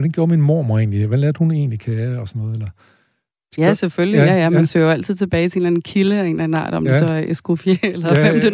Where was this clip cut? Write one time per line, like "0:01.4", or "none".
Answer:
none